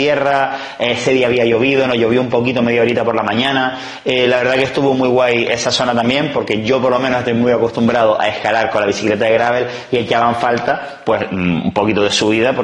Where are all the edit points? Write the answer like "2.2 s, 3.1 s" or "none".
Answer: none